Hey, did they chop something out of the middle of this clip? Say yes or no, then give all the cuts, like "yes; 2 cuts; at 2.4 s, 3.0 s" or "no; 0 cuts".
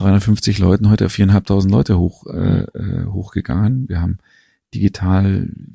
no; 0 cuts